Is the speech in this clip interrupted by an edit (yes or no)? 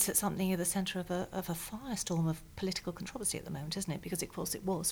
no